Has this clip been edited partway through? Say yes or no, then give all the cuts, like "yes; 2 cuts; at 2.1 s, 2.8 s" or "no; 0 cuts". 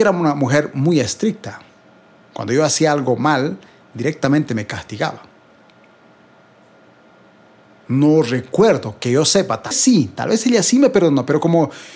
yes; 1 cut; at 9.7 s